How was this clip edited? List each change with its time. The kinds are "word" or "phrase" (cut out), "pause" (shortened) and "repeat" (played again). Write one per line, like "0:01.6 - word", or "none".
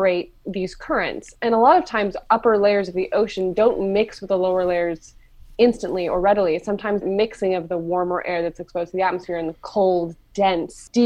0:07.0 - word